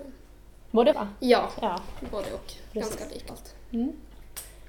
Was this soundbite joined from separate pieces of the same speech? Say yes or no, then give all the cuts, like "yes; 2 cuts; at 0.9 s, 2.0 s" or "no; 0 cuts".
yes; 2 cuts; at 0.9 s, 3.3 s